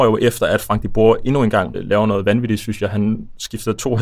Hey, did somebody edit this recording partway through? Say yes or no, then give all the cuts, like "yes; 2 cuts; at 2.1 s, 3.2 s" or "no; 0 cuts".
yes; 1 cut; at 1.7 s